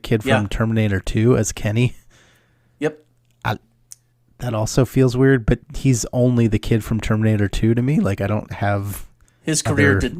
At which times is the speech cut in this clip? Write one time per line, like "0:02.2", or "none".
0:04.1